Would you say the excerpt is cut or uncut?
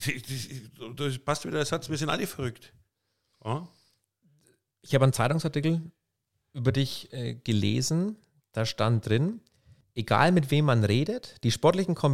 uncut